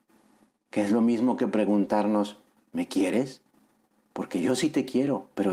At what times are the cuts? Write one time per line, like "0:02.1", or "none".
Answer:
none